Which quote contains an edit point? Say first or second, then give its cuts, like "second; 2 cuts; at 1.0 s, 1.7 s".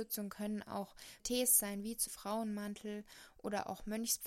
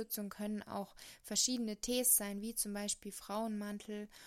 first; 2 cuts; at 1.2 s, 2.1 s